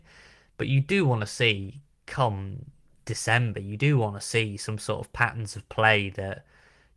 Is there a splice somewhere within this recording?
no; 0 cuts

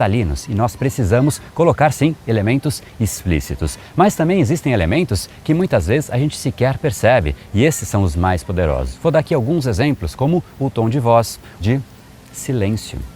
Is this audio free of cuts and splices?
no; 1 cut; at 11.6 s

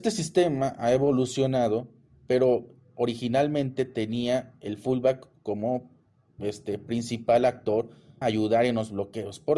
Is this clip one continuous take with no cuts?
no; 1 cut; at 8.2 s

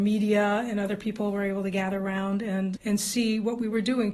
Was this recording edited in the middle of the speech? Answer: yes; 1 cut; at 2.8 s

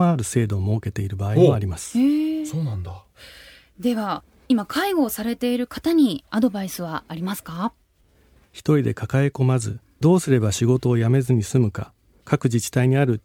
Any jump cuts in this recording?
no; 0 cuts

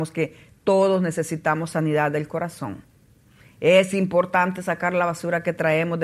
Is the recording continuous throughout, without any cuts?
yes; 0 cuts

